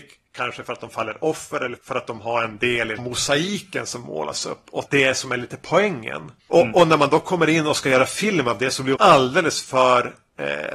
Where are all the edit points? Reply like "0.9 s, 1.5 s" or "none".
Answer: 1.8 s, 3.0 s, 4.9 s, 9.0 s